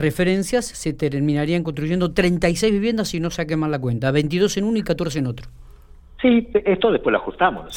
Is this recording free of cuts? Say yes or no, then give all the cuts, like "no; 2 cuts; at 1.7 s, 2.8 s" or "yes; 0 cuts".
yes; 0 cuts